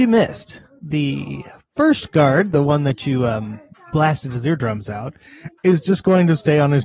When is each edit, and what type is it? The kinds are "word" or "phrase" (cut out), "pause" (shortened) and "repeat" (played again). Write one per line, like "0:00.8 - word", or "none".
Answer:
none